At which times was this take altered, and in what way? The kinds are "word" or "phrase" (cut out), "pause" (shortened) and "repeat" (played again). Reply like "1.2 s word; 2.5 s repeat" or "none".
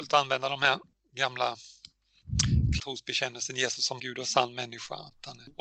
2.8 s word; 4.0 s word